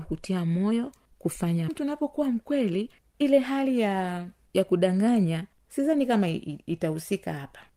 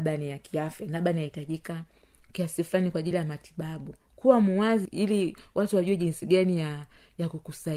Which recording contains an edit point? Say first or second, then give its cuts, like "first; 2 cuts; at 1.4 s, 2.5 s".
first; 1 cut; at 1.7 s